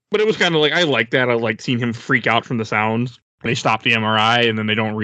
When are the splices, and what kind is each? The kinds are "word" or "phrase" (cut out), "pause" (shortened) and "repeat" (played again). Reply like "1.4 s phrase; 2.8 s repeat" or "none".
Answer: 3.5 s word